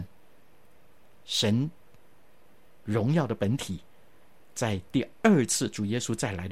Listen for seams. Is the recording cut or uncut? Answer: uncut